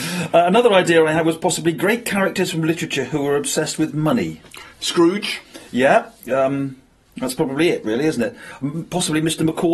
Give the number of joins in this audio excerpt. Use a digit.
2